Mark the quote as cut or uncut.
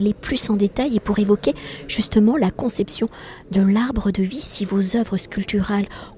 uncut